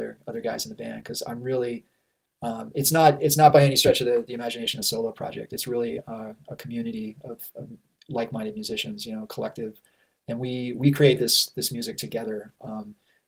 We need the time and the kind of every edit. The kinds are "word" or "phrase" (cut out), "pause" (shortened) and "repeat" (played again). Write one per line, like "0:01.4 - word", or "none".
none